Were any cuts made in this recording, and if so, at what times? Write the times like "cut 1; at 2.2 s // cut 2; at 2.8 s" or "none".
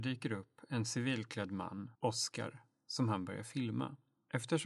cut 1; at 1.9 s